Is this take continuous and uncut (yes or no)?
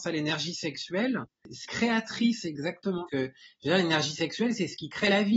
no